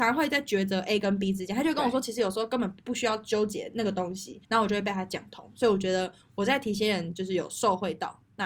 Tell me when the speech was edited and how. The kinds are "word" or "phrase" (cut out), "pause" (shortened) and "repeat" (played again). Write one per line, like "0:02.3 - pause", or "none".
0:04.4 - pause